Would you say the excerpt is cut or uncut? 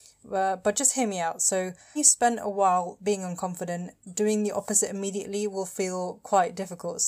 cut